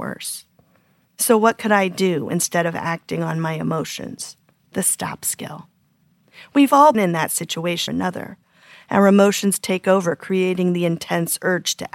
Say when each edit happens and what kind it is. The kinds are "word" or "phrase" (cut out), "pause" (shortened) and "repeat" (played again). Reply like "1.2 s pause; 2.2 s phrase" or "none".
4.5 s pause; 6.9 s word; 7.9 s phrase